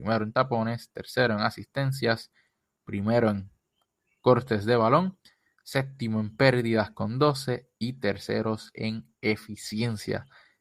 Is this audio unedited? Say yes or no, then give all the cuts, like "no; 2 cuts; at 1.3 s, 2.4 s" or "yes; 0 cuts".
yes; 0 cuts